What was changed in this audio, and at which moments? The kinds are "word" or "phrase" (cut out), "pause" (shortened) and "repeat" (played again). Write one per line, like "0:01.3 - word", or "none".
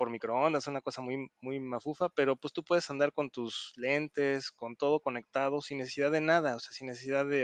none